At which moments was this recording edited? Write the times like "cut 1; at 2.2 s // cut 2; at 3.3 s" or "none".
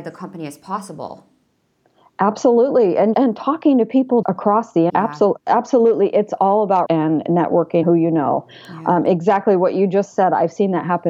cut 1; at 3.1 s // cut 2; at 4.2 s // cut 3; at 4.9 s // cut 4; at 6.9 s // cut 5; at 7.8 s